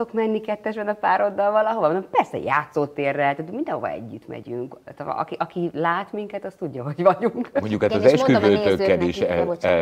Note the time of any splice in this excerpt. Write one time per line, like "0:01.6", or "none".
none